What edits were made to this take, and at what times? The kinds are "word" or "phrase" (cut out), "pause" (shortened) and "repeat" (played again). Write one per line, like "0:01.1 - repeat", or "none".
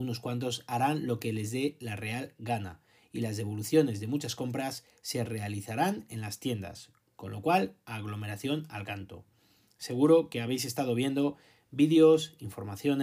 none